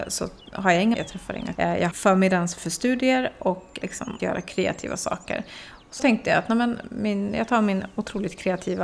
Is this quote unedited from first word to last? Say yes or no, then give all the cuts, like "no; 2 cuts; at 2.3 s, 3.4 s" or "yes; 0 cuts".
no; 6 cuts; at 0.9 s, 1.5 s, 1.9 s, 3.8 s, 4.2 s, 6.0 s